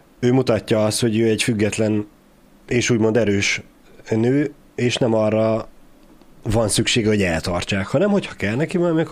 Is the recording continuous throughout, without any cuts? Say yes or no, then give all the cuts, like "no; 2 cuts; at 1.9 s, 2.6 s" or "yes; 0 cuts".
yes; 0 cuts